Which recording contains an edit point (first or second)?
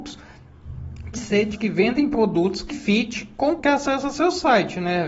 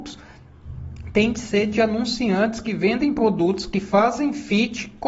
first